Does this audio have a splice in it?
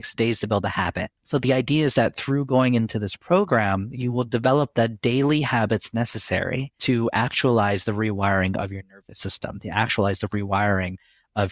yes; 1 cut; at 1.2 s

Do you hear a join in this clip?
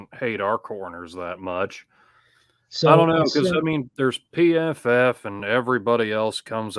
no; 0 cuts

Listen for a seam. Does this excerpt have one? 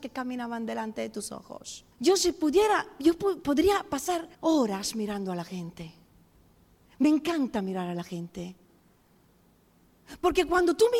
yes; 2 cuts; at 1.9 s, 4.3 s

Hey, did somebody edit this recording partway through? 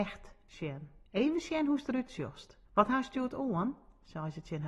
yes; 2 cuts; at 1.1 s, 2.6 s

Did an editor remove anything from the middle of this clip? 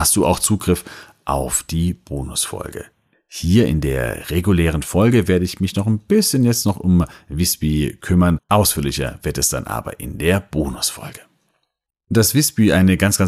yes; 1 cut; at 8.4 s

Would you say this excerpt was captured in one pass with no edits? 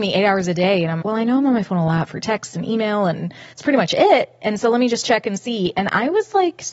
no; 2 cuts; at 1.0 s, 3.5 s

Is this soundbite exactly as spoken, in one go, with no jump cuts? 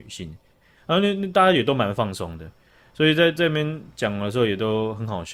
yes; 0 cuts

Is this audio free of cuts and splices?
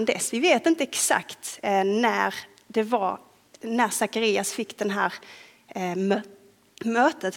yes; 0 cuts

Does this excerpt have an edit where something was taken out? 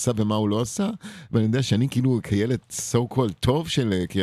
no; 0 cuts

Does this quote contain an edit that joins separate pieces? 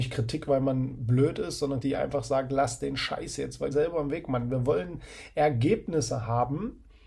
yes; 2 cuts; at 1.8 s, 3.7 s

